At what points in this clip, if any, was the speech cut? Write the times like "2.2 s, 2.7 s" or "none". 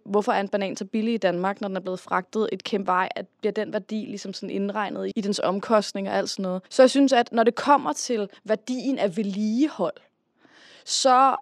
2.8 s, 5.1 s, 6.7 s